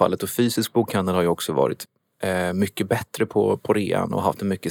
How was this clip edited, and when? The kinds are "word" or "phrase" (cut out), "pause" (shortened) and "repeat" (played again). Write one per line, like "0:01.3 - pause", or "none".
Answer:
none